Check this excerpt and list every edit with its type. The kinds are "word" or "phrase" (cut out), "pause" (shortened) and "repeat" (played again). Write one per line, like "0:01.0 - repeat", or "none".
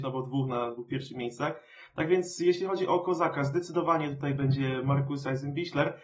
none